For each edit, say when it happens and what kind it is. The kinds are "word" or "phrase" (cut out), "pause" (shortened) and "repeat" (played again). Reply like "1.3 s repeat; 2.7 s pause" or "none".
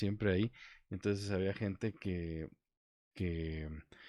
none